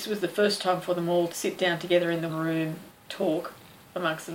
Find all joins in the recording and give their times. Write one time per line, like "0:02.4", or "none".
0:01.3
0:02.3
0:02.9